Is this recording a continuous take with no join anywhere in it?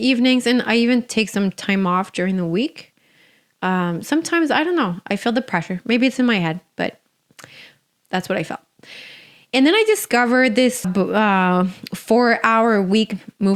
no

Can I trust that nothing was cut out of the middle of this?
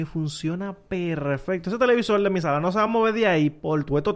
yes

